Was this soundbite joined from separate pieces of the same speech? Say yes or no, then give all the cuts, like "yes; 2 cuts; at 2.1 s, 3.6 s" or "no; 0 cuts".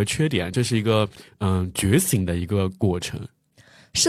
no; 0 cuts